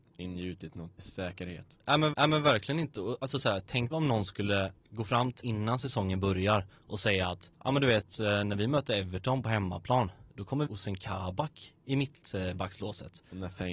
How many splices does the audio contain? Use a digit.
7